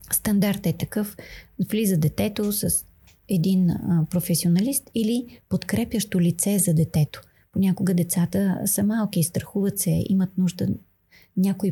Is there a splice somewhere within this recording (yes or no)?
no